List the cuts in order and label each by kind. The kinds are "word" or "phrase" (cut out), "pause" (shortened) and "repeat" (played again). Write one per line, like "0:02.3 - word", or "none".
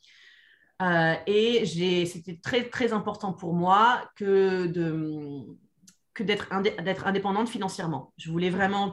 none